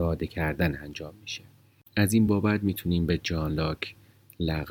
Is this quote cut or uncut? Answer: uncut